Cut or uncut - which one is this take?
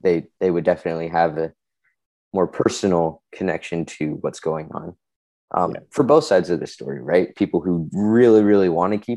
uncut